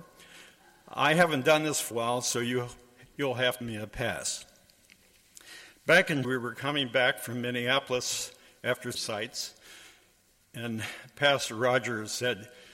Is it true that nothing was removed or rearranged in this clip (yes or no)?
no